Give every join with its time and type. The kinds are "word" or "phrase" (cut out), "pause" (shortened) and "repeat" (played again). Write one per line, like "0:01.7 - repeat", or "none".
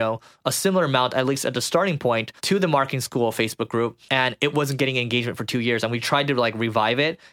0:02.4 - pause